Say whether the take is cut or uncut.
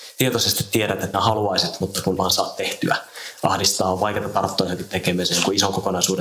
cut